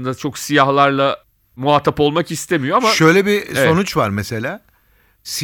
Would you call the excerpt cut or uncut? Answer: uncut